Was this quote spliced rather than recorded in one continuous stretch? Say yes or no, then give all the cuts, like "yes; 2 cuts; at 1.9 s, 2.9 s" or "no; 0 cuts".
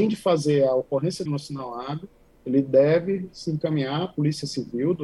yes; 1 cut; at 1.3 s